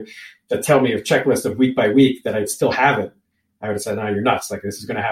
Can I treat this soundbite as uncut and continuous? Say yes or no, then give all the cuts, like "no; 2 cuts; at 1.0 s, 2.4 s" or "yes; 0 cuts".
yes; 0 cuts